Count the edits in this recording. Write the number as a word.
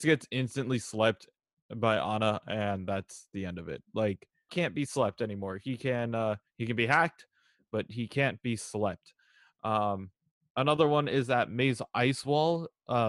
one